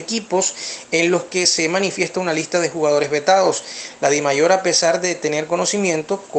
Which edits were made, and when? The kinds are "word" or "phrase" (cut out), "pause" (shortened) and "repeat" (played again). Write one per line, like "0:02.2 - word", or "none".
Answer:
none

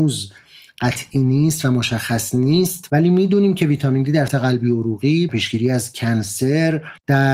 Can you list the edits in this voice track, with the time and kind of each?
0:04.3 - word
0:05.3 - word

